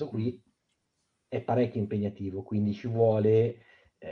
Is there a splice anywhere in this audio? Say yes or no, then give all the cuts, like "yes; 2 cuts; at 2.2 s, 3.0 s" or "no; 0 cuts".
no; 0 cuts